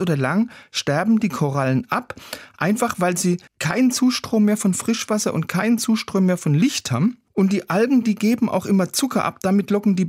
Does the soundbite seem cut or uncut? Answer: cut